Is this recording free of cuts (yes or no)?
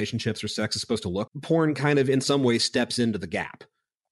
no